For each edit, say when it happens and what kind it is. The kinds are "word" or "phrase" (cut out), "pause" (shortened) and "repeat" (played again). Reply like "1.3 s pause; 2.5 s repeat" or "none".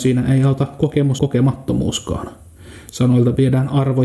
1.2 s phrase